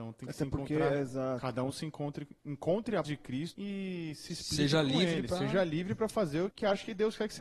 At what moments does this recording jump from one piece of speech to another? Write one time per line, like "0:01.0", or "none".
0:02.4
0:03.0
0:03.5
0:06.5